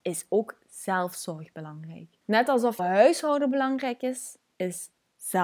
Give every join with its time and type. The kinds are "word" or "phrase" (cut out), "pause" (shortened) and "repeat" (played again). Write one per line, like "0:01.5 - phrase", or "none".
0:02.2 - pause
0:02.8 - word